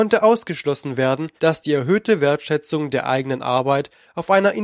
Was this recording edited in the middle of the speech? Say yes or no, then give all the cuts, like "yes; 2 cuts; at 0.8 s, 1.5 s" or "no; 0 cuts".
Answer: yes; 1 cut; at 1.4 s